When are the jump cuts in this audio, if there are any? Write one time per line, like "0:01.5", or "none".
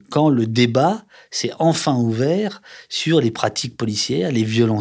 none